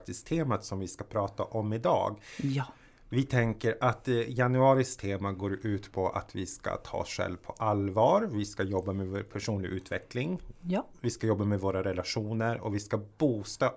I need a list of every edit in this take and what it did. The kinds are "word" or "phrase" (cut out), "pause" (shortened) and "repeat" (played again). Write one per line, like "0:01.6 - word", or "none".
none